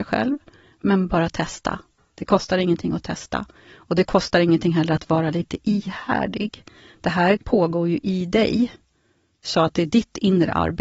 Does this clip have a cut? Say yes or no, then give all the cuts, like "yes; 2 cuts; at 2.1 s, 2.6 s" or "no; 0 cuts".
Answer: no; 0 cuts